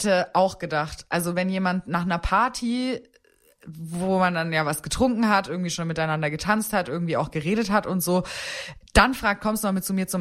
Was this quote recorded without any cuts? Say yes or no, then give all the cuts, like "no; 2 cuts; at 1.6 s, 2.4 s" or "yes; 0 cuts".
yes; 0 cuts